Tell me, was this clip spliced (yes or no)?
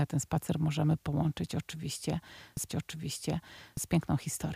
yes